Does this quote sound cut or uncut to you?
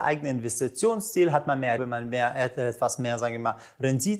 cut